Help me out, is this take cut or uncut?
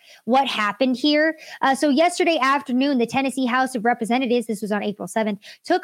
uncut